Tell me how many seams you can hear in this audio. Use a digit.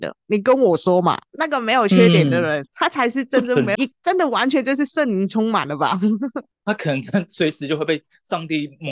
2